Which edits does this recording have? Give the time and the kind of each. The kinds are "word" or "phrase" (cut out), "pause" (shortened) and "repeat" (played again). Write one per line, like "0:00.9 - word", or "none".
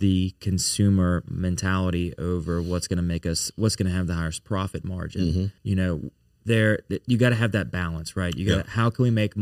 0:05.6 - pause